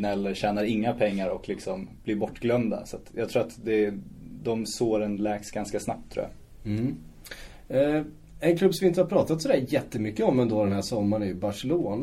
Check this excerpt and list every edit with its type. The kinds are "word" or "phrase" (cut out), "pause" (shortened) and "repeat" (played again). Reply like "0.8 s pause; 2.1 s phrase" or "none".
none